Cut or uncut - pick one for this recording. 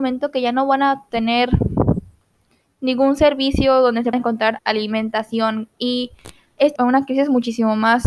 cut